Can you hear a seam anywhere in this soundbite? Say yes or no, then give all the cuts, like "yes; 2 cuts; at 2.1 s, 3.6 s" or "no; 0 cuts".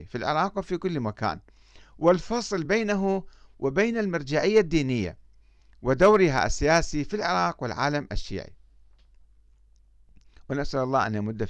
no; 0 cuts